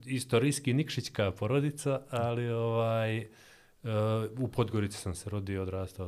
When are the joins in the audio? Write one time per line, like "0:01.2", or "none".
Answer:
none